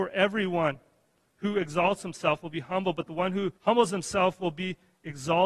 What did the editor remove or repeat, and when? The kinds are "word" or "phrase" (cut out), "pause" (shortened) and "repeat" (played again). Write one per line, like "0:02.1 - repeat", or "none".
0:03.6 - pause